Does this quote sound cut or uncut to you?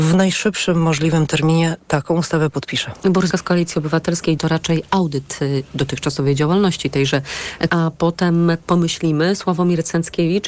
cut